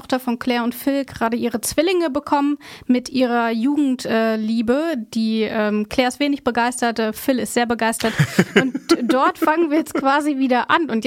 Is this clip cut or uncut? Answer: uncut